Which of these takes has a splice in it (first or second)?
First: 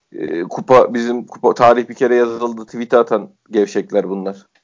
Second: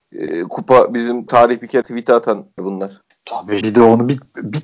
second